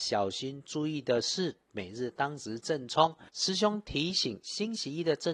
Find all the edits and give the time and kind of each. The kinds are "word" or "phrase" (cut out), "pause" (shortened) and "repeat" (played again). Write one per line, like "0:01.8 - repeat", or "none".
0:03.3 - pause

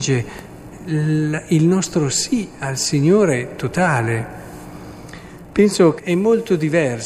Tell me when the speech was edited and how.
0:06.0 - word

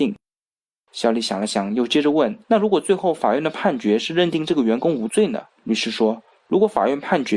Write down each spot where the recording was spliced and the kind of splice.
0:02.4 - pause
0:05.5 - pause

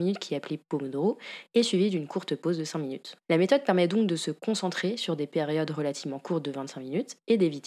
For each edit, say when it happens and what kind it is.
0:03.2 - pause

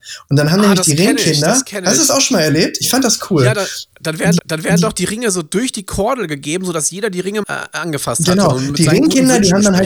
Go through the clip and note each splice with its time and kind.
0:04.4 - repeat
0:07.4 - word

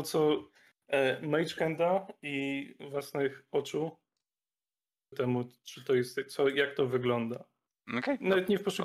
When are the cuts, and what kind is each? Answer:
0:05.1 - phrase

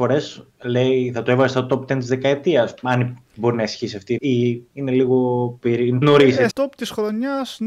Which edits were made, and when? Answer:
0:04.2 - word
0:04.7 - pause
0:06.0 - word
0:06.5 - word

